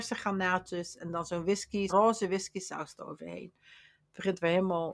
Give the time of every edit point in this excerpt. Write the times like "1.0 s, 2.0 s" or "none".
1.9 s